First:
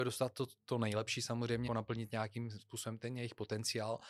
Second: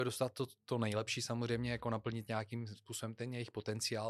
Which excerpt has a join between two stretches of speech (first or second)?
first